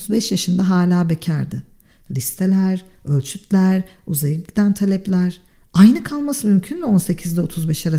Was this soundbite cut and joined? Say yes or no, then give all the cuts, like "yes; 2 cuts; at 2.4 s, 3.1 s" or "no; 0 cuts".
no; 0 cuts